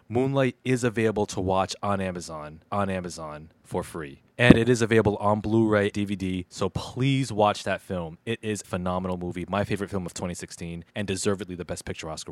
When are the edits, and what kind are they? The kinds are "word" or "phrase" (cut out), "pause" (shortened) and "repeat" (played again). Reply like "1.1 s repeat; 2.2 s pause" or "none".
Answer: 2.7 s repeat; 4.3 s pause; 5.9 s word; 8.6 s word; 10.9 s pause